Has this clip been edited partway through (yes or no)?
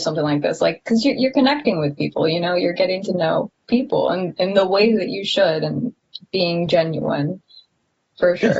yes